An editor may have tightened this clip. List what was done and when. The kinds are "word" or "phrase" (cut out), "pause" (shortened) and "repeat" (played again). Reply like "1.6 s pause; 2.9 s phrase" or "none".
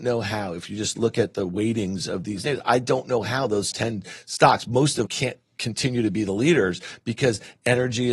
3.7 s word; 5.1 s word